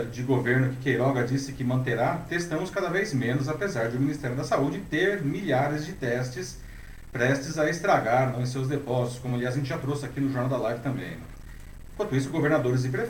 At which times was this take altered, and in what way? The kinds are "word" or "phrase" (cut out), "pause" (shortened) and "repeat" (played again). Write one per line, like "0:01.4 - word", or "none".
none